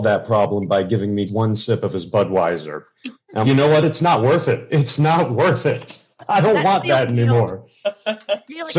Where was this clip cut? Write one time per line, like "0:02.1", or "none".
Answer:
0:01.3
0:03.4